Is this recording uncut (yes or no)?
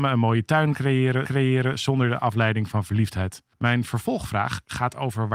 no